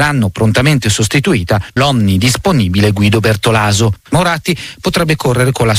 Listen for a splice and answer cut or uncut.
cut